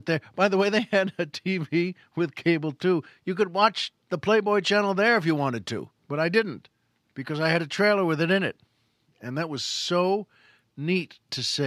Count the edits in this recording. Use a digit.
2